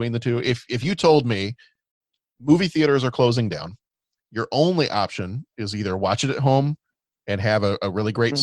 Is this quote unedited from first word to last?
yes; 0 cuts

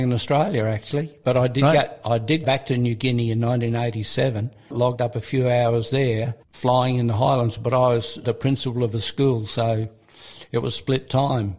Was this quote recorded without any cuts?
no; 2 cuts; at 2.4 s, 8.2 s

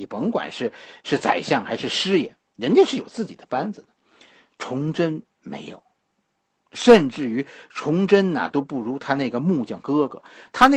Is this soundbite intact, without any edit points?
yes; 0 cuts

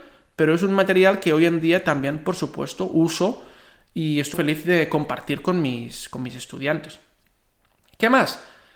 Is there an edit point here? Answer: yes; 1 cut; at 4.3 s

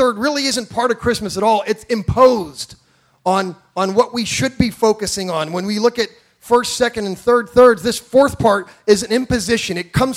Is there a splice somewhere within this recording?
no; 0 cuts

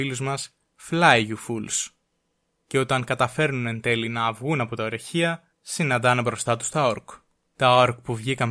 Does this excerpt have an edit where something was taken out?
yes; 1 cut; at 5.5 s

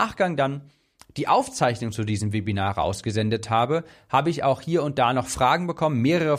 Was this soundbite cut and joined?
no; 0 cuts

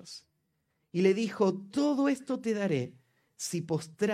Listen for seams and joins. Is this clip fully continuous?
yes; 0 cuts

